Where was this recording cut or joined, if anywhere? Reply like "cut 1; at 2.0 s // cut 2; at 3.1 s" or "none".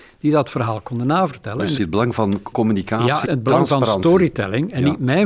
cut 1; at 1.8 s // cut 2; at 2.5 s // cut 3; at 3.3 s